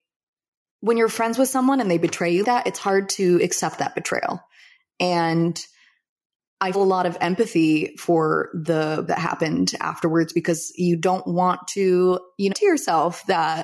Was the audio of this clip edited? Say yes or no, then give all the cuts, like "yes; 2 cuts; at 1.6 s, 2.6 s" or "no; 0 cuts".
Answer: yes; 4 cuts; at 2.4 s, 6.7 s, 9.1 s, 12.5 s